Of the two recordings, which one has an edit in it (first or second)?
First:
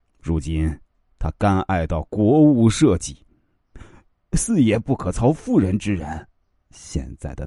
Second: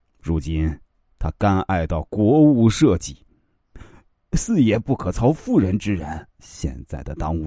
second